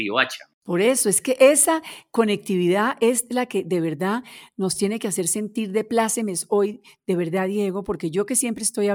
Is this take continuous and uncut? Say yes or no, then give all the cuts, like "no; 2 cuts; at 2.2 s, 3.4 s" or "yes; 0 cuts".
yes; 0 cuts